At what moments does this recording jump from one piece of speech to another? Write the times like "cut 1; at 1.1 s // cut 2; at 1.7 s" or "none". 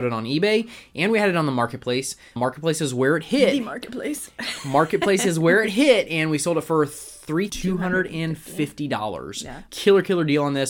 cut 1; at 7.5 s